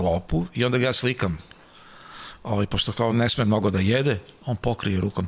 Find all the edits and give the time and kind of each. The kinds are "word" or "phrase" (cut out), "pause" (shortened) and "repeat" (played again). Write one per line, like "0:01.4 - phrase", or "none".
none